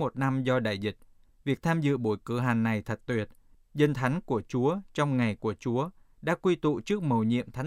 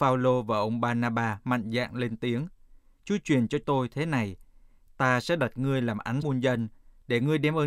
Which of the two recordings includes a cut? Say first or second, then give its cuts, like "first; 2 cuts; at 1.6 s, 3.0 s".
second; 2 cuts; at 3.6 s, 6.2 s